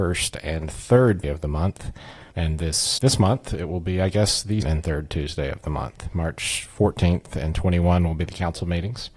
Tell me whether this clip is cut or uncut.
cut